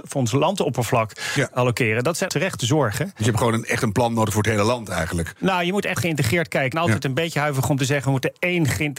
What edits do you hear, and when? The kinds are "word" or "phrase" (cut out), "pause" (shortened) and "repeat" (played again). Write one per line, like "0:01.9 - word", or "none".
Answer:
0:02.3 - word
0:06.0 - word
0:06.7 - word